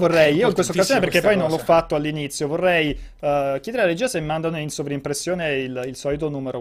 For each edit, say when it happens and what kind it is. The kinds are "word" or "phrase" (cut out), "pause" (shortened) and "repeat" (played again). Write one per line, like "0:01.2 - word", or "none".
none